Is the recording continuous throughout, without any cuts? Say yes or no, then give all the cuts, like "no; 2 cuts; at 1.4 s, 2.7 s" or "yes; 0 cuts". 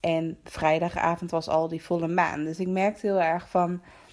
yes; 0 cuts